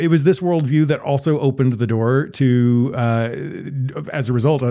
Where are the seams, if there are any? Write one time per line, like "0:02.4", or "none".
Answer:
none